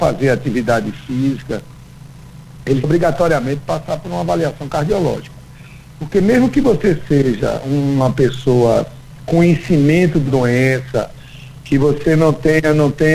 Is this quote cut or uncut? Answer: cut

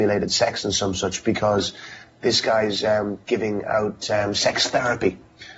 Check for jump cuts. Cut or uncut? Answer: uncut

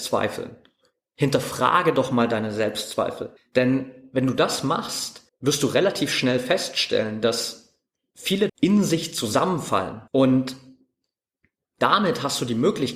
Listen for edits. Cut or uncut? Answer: cut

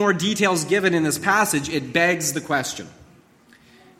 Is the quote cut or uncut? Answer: uncut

